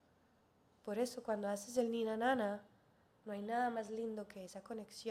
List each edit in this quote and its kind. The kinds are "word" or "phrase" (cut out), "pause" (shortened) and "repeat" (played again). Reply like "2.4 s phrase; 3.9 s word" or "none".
3.2 s word